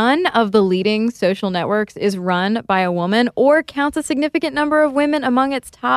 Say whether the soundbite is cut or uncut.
uncut